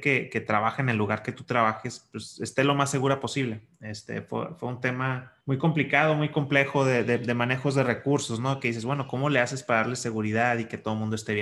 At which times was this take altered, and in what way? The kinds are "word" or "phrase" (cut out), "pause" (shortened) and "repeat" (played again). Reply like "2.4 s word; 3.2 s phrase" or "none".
5.4 s pause